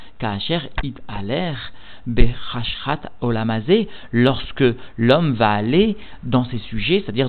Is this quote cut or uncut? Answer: uncut